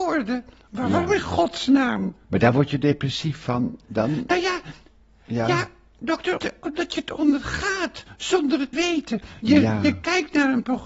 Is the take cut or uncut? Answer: cut